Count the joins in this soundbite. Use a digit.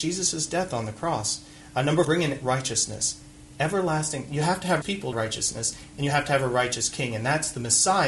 4